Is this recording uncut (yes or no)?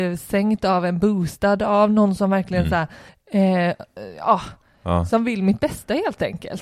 yes